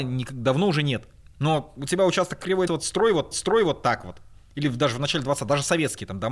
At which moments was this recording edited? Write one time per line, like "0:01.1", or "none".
0:02.7
0:03.3